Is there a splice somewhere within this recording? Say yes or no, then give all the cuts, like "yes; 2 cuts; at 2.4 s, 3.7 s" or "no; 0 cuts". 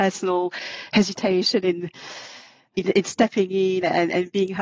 no; 0 cuts